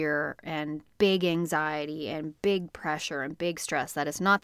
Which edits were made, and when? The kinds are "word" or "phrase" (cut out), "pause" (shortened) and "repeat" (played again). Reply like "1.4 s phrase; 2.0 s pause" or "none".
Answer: none